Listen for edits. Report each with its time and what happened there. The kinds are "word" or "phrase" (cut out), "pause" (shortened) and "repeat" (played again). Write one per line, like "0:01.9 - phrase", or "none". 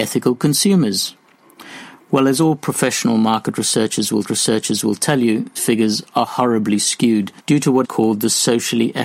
0:04.2 - repeat
0:05.6 - word
0:07.4 - pause
0:07.8 - word